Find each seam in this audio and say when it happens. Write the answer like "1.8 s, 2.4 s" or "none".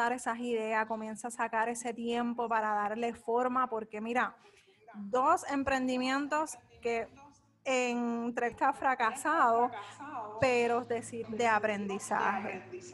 8.5 s, 11.2 s